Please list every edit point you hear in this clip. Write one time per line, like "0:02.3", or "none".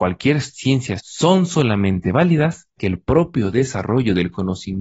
0:01.0
0:02.8